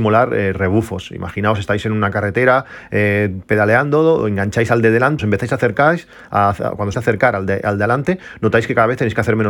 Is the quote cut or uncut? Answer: cut